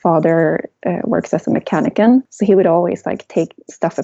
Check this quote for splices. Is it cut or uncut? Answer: uncut